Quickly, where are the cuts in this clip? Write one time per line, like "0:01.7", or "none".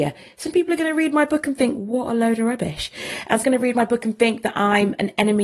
0:03.4